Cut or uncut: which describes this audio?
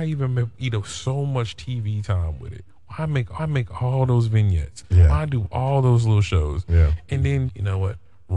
cut